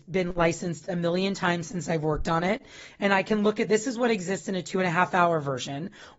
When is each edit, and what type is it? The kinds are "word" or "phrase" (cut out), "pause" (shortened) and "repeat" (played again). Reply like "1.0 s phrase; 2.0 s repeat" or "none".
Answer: 3.7 s phrase

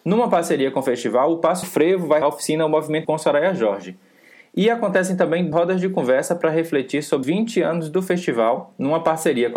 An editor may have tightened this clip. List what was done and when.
1.6 s word; 2.2 s word; 3.0 s word; 5.5 s word; 7.2 s word

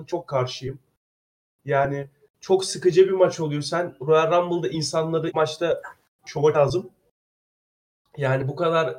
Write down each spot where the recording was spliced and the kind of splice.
5.3 s word; 6.5 s word

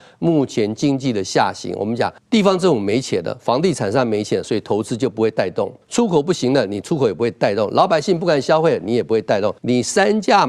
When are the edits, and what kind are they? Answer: 2.2 s pause; 5.8 s pause; 9.6 s pause

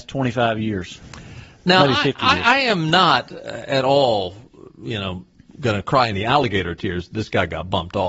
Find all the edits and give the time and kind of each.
none

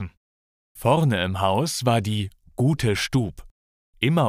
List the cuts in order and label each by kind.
none

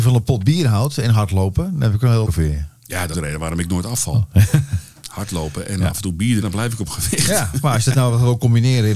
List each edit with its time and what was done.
2.3 s word; 3.1 s word; 6.4 s word

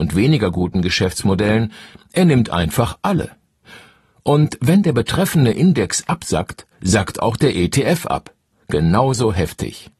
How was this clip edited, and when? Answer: none

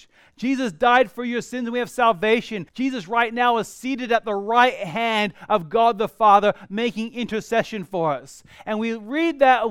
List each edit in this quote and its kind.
2.7 s pause

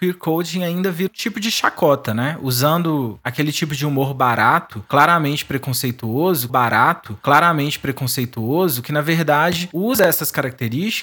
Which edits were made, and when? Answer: 1.1 s word; 6.5 s repeat

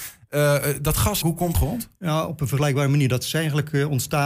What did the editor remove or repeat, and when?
1.2 s word; 1.5 s phrase

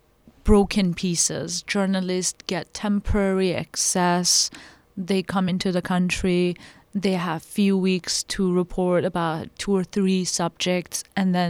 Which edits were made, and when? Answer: none

